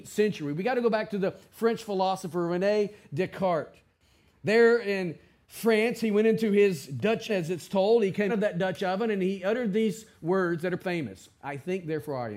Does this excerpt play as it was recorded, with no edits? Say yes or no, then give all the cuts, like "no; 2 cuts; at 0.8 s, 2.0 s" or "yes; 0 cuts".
no; 3 cuts; at 7.3 s, 8.3 s, 10.8 s